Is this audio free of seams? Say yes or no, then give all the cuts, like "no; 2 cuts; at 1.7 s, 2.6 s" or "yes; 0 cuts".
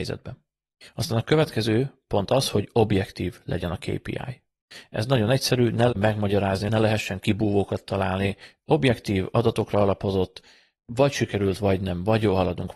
no; 1 cut; at 5.9 s